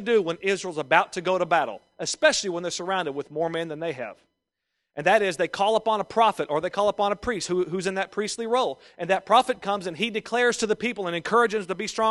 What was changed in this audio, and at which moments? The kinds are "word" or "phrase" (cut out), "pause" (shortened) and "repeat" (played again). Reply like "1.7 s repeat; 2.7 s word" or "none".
none